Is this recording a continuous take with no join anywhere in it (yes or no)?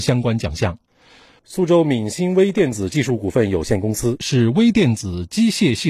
yes